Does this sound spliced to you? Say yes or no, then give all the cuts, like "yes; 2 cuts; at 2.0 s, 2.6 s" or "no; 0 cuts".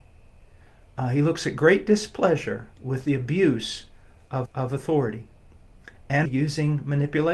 yes; 3 cuts; at 2.7 s, 4.5 s, 6.2 s